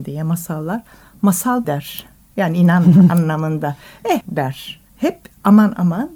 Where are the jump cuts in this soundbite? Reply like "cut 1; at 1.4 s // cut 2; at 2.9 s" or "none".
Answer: cut 1; at 1.6 s // cut 2; at 4.2 s // cut 3; at 4.9 s